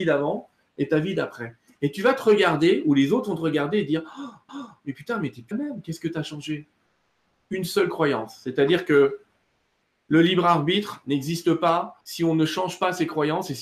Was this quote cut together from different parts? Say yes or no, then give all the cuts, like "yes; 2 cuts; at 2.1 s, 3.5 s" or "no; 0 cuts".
yes; 3 cuts; at 4.5 s, 5.5 s, 12.0 s